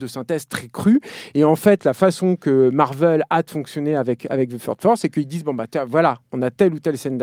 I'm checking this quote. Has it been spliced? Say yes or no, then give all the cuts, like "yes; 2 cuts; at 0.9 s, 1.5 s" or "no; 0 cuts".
no; 0 cuts